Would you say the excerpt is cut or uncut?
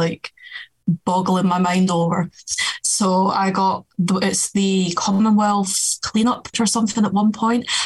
cut